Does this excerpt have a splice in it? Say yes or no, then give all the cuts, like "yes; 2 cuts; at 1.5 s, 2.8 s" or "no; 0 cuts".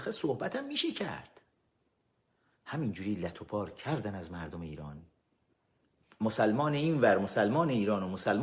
no; 0 cuts